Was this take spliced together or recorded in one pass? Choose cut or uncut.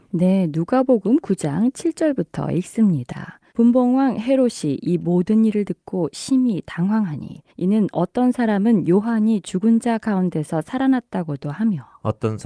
cut